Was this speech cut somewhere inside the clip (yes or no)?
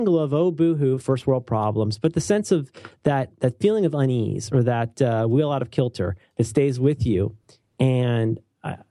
no